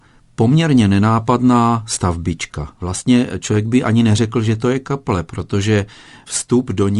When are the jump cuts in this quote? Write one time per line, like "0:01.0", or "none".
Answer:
0:02.7